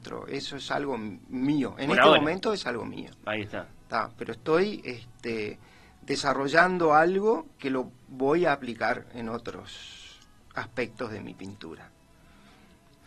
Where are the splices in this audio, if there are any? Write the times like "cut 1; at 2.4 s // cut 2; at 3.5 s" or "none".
none